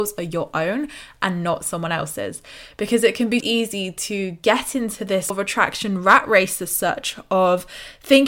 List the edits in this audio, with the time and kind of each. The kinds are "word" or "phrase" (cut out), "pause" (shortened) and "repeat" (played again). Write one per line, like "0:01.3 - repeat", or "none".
0:03.4 - word
0:05.3 - word